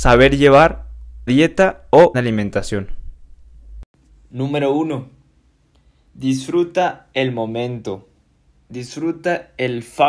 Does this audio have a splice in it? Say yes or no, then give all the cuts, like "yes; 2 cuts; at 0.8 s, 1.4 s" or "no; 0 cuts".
yes; 2 cuts; at 1.3 s, 2.1 s